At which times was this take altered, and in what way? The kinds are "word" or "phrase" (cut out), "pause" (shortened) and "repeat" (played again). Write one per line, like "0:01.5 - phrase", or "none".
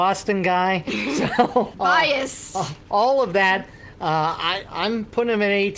0:01.7 - word